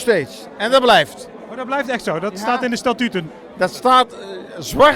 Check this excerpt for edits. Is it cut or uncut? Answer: uncut